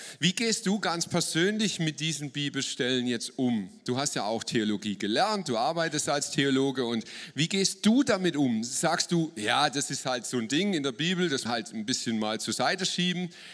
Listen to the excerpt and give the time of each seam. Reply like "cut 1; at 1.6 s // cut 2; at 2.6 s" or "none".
cut 1; at 11.5 s